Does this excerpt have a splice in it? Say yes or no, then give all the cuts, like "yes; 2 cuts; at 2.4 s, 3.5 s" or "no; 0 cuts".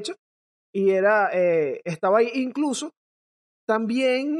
no; 0 cuts